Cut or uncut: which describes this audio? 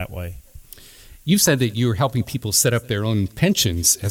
uncut